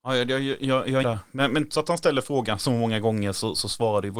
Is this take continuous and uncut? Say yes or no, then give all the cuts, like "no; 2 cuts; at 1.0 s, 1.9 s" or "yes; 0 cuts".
no; 2 cuts; at 1.0 s, 1.7 s